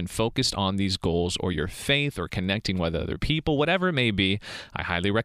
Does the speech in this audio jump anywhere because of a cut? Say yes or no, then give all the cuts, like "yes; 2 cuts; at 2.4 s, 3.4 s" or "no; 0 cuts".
no; 0 cuts